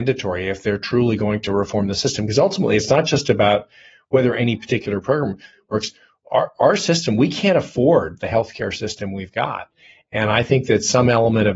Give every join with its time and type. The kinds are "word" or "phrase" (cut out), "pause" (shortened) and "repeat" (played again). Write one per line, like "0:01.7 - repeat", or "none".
none